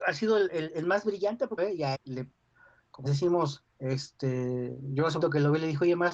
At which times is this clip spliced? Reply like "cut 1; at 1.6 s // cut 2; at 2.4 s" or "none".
cut 1; at 1.6 s // cut 2; at 1.9 s // cut 3; at 3.1 s // cut 4; at 3.7 s // cut 5; at 5.2 s